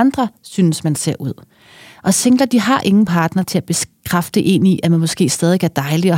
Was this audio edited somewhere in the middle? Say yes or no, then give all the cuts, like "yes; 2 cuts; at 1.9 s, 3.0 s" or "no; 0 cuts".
no; 0 cuts